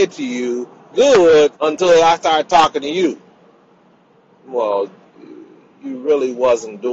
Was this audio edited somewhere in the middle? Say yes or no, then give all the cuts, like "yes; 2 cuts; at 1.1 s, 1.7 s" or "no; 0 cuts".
yes; 2 cuts; at 0.9 s, 1.6 s